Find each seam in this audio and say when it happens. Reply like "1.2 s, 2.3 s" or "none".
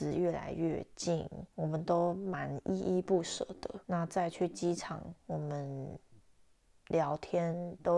1.5 s, 3.8 s, 5.2 s